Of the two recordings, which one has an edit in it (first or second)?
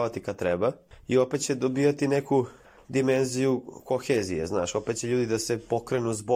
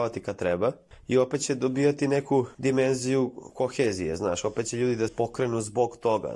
second